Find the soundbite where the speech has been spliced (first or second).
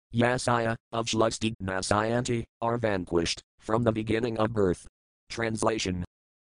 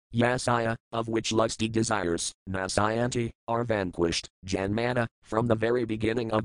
first